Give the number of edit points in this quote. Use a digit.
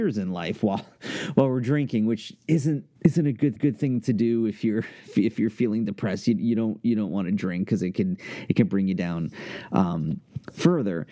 2